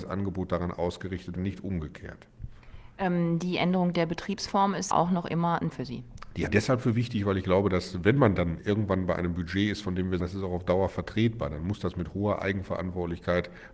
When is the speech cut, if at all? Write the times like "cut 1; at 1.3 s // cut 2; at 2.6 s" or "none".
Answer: cut 1; at 1.4 s // cut 2; at 4.9 s // cut 3; at 5.7 s // cut 4; at 6.5 s // cut 5; at 8.6 s // cut 6; at 10.2 s